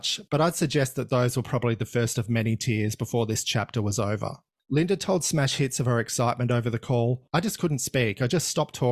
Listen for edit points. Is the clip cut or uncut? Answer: uncut